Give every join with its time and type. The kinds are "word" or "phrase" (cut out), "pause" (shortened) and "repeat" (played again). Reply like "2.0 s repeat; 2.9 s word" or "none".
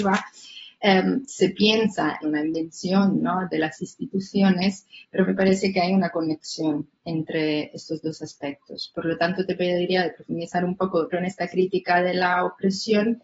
2.2 s phrase; 11.1 s word